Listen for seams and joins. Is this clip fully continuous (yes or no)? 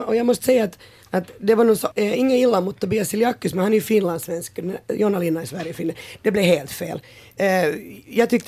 no